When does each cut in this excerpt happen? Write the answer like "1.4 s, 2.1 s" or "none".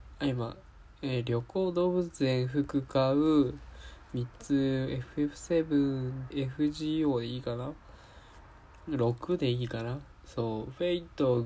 6.3 s